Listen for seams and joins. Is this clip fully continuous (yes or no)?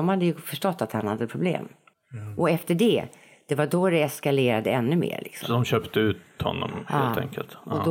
yes